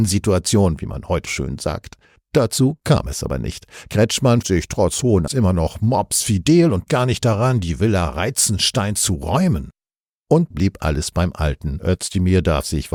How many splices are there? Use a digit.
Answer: 5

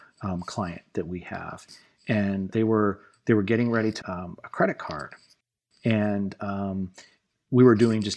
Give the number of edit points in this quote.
2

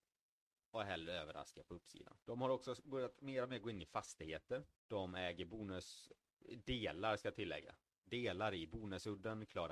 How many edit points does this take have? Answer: 2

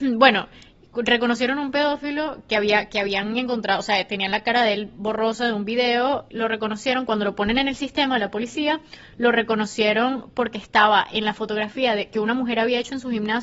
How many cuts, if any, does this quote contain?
2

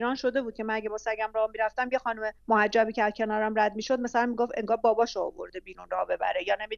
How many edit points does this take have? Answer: 1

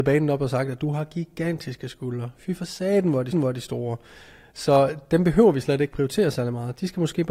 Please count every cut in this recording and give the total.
1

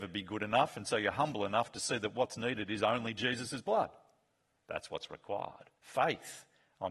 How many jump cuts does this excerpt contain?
1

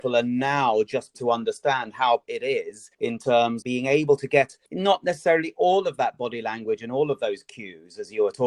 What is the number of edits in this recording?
5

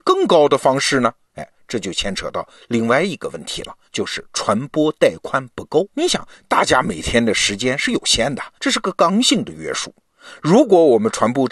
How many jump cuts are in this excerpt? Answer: 3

